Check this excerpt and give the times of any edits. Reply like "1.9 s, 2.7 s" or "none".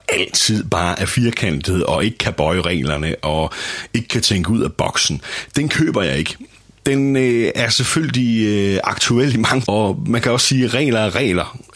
9.6 s